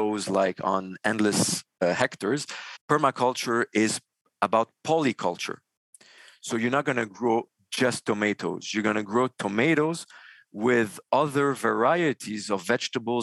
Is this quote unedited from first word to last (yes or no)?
yes